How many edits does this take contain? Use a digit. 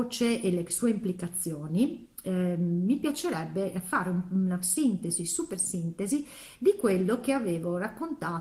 0